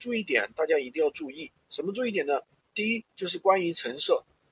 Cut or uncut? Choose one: uncut